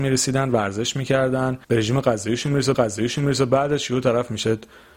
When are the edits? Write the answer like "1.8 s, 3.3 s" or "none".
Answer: 1.6 s, 2.7 s